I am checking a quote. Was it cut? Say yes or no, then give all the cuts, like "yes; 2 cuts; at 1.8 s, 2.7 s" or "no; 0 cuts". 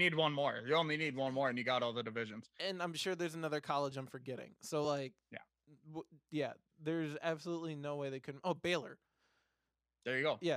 no; 0 cuts